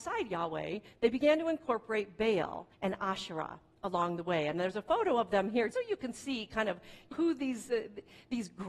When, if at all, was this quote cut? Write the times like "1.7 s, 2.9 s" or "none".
2.7 s, 5.7 s, 7.1 s